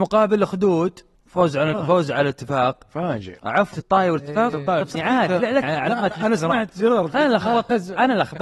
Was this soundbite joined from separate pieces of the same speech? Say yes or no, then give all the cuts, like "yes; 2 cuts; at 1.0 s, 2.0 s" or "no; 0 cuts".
yes; 5 cuts; at 1.1 s, 1.7 s, 3.7 s, 4.9 s, 5.6 s